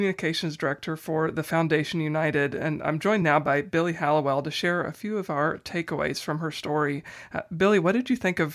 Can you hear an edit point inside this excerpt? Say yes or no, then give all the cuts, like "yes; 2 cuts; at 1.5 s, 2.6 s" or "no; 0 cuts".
no; 0 cuts